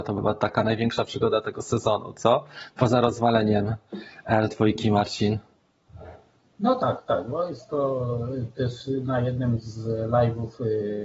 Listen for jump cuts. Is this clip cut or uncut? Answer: uncut